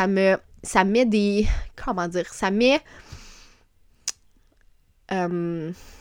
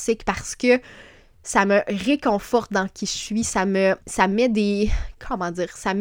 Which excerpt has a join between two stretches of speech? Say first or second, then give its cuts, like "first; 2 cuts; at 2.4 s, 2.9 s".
second; 1 cut; at 4.0 s